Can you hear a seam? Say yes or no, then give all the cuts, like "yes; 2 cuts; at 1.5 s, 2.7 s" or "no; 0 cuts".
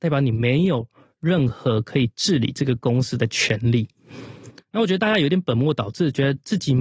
no; 0 cuts